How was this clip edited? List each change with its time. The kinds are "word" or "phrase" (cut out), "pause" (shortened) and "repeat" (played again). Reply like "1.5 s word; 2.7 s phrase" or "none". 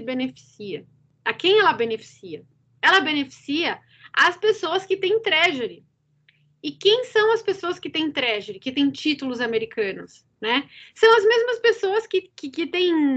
none